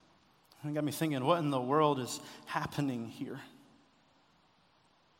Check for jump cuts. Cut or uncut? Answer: uncut